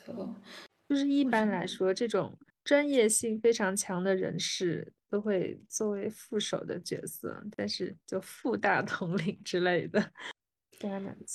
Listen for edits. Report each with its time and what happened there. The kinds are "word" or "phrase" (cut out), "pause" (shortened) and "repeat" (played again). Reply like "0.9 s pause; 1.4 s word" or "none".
2.5 s pause; 10.4 s pause